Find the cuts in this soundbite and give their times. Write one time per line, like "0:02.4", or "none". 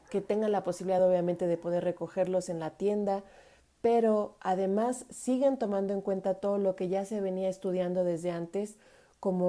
none